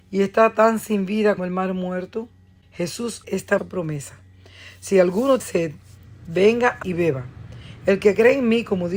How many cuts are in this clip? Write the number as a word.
five